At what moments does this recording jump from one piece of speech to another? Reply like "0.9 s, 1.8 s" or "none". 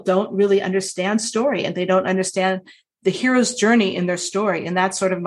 none